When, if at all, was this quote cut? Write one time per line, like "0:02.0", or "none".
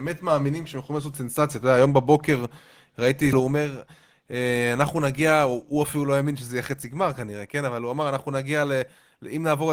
0:03.3